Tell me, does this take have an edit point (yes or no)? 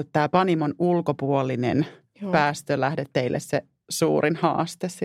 no